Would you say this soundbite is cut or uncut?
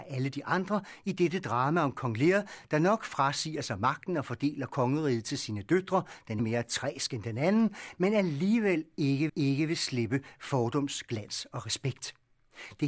cut